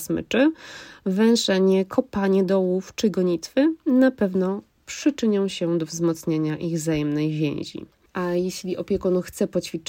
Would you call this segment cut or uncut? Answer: uncut